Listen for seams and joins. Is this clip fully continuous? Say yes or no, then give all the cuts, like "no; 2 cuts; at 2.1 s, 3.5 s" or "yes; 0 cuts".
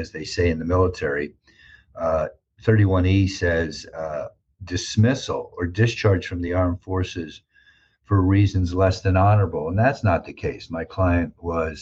yes; 0 cuts